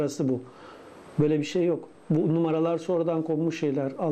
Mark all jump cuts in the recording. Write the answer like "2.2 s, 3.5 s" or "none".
none